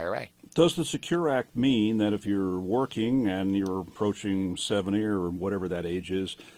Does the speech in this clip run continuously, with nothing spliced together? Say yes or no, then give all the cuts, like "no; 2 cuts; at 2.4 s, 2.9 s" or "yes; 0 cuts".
yes; 0 cuts